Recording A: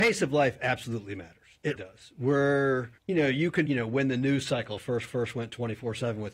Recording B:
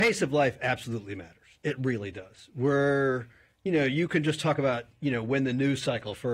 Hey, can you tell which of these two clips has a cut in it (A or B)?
A